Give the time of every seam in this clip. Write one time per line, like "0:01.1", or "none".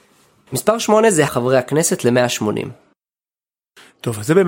0:01.3